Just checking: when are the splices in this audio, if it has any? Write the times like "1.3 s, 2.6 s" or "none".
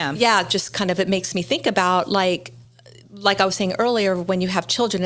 none